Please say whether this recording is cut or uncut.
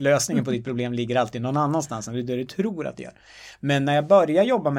uncut